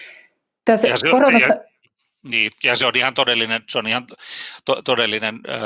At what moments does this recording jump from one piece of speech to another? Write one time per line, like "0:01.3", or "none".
none